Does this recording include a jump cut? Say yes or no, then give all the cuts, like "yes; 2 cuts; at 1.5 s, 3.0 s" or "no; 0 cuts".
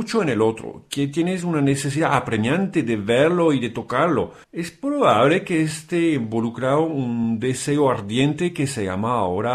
yes; 1 cut; at 4.4 s